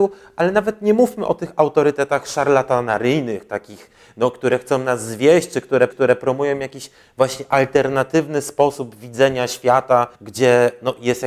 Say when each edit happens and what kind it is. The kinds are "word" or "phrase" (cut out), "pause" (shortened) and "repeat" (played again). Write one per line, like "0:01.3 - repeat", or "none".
0:05.9 - repeat
0:10.1 - pause